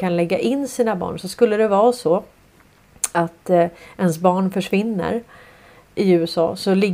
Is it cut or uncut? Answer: uncut